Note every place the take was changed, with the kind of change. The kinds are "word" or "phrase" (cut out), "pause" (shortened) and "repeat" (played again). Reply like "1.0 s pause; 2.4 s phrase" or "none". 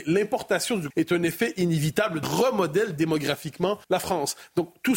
0.9 s word; 2.2 s phrase; 3.8 s pause